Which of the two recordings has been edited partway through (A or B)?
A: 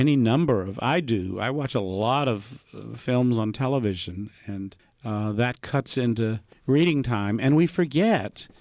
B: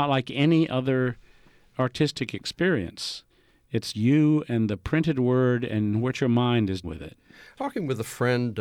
B